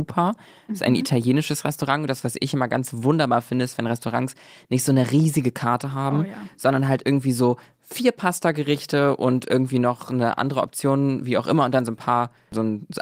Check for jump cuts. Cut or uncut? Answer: uncut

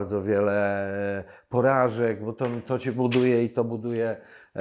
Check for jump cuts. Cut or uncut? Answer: uncut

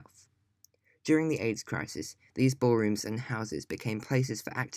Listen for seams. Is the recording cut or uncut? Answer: uncut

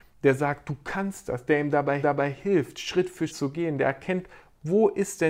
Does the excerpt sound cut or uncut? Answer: cut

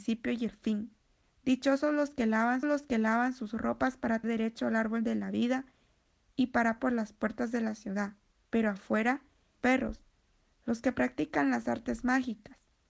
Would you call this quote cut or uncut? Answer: cut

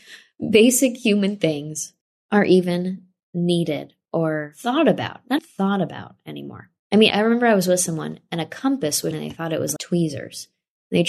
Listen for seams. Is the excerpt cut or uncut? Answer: cut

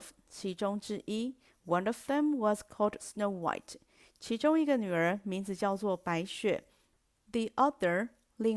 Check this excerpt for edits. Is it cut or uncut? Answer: uncut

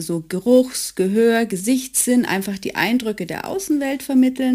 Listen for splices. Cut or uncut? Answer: uncut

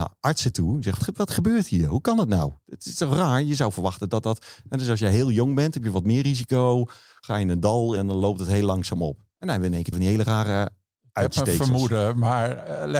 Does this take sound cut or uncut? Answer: cut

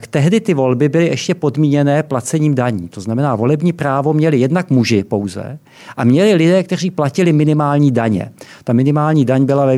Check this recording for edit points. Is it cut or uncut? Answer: uncut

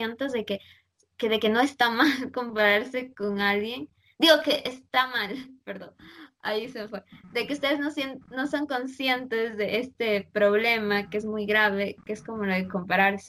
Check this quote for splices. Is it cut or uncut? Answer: uncut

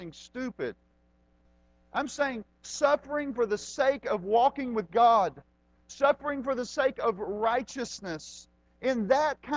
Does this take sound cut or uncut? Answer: uncut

